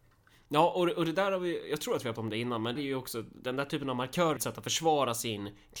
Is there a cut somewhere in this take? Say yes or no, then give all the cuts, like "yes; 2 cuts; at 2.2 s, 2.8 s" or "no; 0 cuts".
yes; 3 cuts; at 2.2 s, 2.8 s, 4.4 s